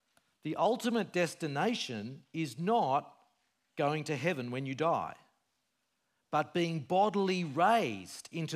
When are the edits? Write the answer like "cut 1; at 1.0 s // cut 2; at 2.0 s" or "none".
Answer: none

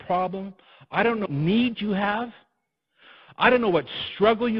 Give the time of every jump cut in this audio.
cut 1; at 1.3 s

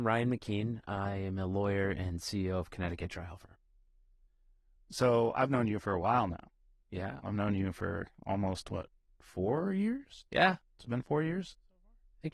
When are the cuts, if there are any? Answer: cut 1; at 10.3 s

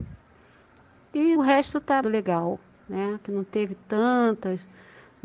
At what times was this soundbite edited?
cut 1; at 1.4 s // cut 2; at 2.0 s // cut 3; at 3.3 s

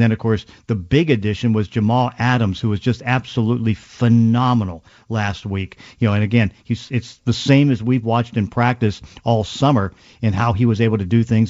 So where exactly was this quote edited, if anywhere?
none

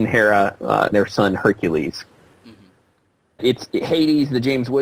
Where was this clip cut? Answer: cut 1; at 0.9 s // cut 2; at 3.4 s

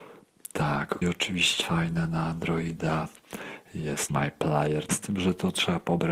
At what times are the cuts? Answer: cut 1; at 1.0 s // cut 2; at 1.6 s // cut 3; at 4.1 s // cut 4; at 4.9 s

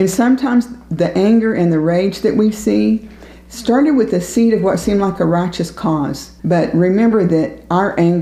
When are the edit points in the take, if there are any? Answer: cut 1; at 6.4 s

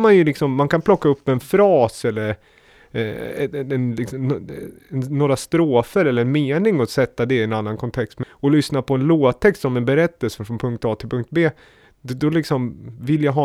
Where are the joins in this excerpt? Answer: cut 1; at 8.2 s

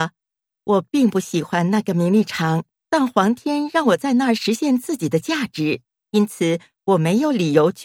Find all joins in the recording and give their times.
cut 1; at 2.7 s // cut 2; at 6.0 s

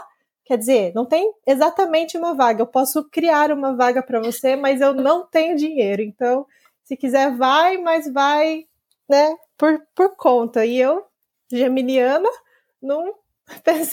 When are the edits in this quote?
none

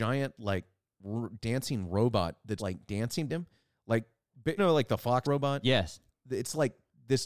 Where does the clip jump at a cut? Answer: cut 1; at 2.6 s // cut 2; at 3.3 s // cut 3; at 4.6 s // cut 4; at 5.2 s // cut 5; at 6.1 s

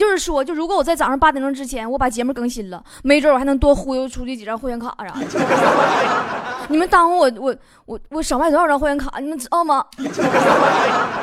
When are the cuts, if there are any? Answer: none

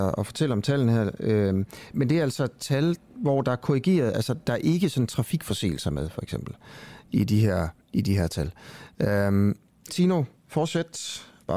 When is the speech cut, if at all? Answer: cut 1; at 1.9 s // cut 2; at 7.8 s // cut 3; at 9.9 s // cut 4; at 10.4 s

